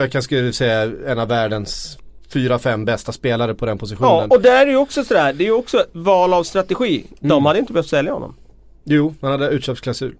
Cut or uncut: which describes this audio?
uncut